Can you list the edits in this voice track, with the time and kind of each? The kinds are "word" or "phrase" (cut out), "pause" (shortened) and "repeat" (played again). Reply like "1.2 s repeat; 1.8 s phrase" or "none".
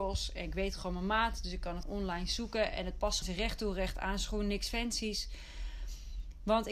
1.8 s word; 3.2 s word